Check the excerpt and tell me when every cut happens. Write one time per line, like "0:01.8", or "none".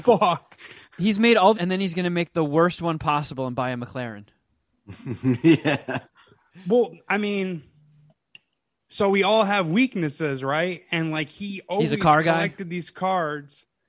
0:01.5